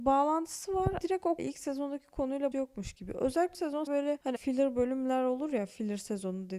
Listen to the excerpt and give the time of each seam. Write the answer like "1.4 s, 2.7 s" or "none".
1.0 s, 1.4 s, 2.5 s, 3.5 s, 3.9 s, 4.4 s